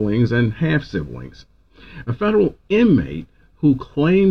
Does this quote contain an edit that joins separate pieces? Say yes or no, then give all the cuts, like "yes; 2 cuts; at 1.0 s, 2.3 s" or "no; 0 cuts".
no; 0 cuts